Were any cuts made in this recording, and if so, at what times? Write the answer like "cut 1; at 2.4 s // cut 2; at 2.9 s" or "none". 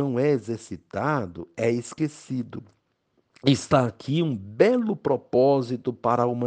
none